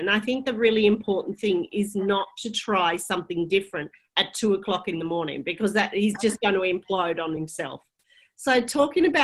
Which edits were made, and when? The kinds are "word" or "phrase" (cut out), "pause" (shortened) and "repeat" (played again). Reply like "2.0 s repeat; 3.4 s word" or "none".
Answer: none